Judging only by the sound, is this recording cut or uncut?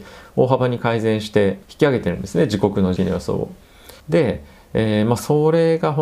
cut